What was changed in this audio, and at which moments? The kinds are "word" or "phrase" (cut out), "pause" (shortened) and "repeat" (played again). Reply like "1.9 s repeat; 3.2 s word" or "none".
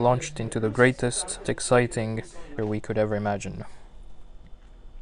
1.4 s word; 2.6 s word